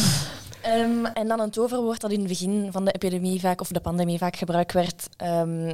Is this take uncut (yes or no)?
yes